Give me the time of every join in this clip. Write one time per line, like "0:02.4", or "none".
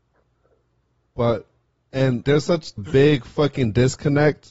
0:02.2
0:02.8